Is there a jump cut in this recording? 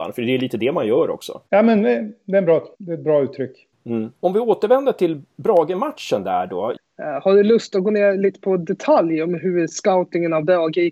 yes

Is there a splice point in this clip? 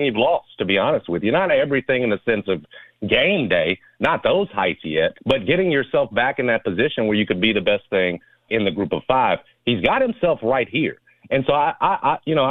yes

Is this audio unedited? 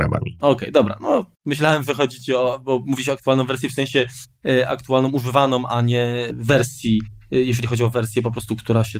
no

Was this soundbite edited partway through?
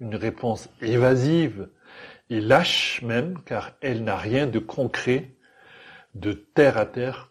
no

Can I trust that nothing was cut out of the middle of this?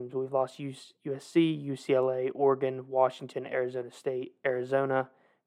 yes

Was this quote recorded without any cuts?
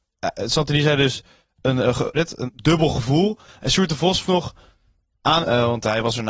no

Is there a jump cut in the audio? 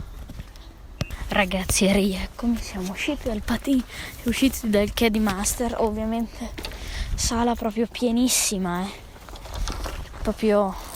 no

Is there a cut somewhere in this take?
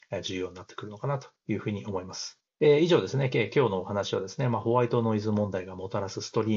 yes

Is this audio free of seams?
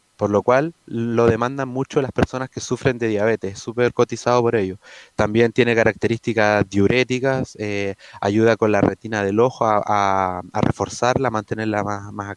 yes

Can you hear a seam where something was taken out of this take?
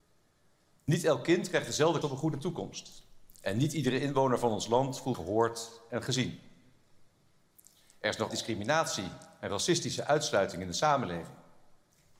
yes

